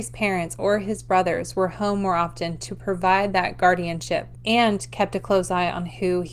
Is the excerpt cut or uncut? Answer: uncut